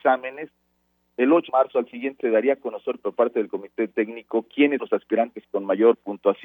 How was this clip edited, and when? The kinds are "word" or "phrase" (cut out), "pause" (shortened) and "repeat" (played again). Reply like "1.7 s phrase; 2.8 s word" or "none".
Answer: 1.5 s word; 2.2 s word; 4.8 s word